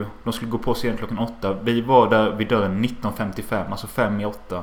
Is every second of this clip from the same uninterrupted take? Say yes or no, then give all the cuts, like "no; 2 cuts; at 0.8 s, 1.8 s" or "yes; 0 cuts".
yes; 0 cuts